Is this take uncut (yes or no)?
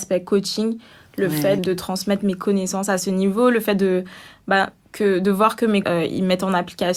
no